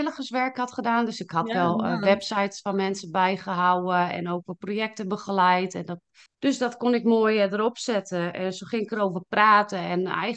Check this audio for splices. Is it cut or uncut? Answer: cut